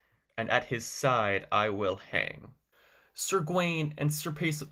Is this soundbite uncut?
no; 1 cut; at 2.7 s

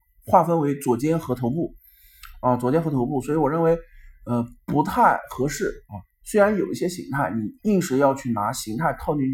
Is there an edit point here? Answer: yes; 1 cut; at 7.6 s

